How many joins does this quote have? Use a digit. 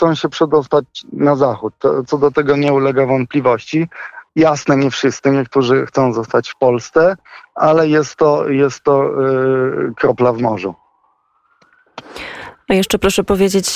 1